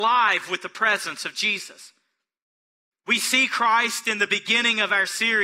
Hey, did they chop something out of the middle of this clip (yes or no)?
no